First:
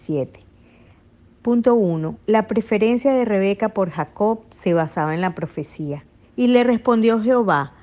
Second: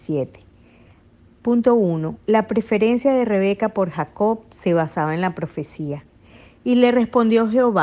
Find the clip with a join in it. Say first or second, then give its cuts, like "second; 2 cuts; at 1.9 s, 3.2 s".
first; 1 cut; at 6.2 s